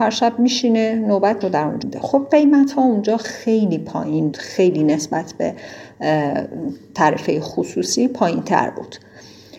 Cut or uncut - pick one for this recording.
cut